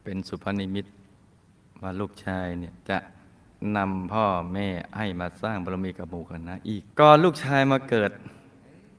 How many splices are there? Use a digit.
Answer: 2